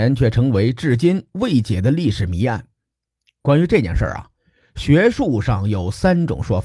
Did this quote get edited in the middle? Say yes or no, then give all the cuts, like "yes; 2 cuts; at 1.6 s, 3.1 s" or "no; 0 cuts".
no; 0 cuts